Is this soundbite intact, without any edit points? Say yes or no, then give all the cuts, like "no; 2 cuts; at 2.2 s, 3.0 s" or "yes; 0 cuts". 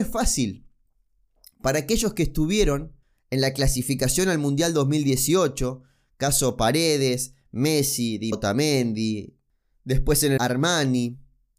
no; 3 cuts; at 3.0 s, 8.3 s, 10.4 s